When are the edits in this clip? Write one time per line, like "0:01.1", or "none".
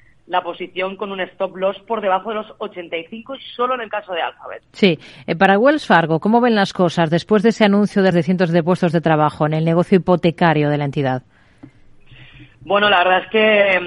0:08.1